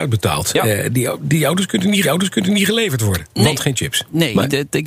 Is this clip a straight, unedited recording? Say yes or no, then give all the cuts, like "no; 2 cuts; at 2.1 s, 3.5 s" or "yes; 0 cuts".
no; 1 cut; at 2.0 s